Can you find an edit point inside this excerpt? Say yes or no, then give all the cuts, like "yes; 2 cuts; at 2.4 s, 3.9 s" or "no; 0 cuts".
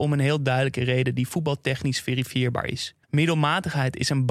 yes; 1 cut; at 3.0 s